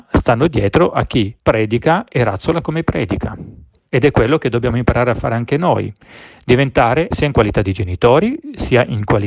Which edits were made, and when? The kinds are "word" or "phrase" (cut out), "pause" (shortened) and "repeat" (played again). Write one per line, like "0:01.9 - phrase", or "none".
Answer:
0:01.4 - pause
0:07.1 - word